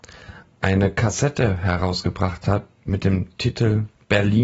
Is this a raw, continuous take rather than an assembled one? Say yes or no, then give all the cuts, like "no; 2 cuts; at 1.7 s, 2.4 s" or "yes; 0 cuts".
yes; 0 cuts